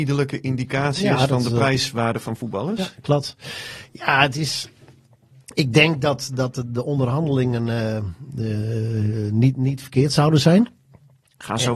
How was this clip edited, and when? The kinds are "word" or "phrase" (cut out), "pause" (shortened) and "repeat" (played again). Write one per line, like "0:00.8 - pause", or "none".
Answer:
none